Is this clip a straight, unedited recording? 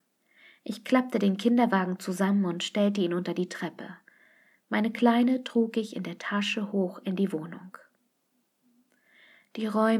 yes; 0 cuts

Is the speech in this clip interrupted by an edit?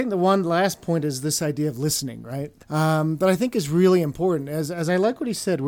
yes; 1 cut; at 2.6 s

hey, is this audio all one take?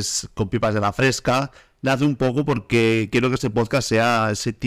yes; 0 cuts

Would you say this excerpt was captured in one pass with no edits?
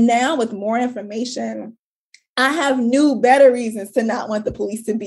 yes; 0 cuts

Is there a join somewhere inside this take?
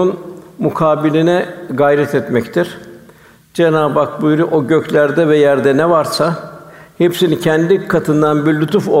no; 0 cuts

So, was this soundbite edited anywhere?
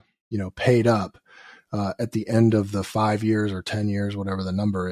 no; 0 cuts

